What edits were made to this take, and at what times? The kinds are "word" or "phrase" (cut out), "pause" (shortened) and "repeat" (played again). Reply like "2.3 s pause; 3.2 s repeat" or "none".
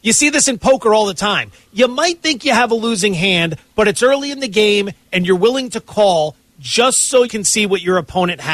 7.3 s word